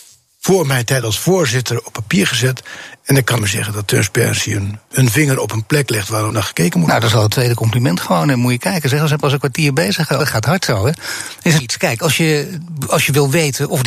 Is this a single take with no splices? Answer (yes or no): no